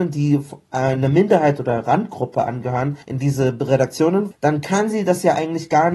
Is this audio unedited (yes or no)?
no